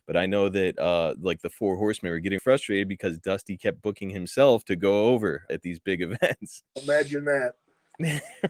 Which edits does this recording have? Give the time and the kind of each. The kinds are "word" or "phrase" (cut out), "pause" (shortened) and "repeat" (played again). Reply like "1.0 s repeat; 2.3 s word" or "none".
2.4 s word; 5.5 s word; 6.7 s pause